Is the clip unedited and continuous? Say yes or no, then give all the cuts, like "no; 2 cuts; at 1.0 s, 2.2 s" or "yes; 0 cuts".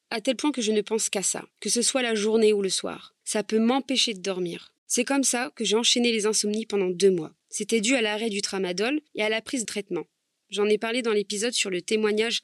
no; 6 cuts; at 1.5 s, 3.2 s, 4.8 s, 7.4 s, 9.1 s, 9.6 s